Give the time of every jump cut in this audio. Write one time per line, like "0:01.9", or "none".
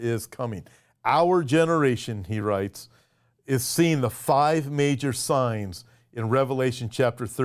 none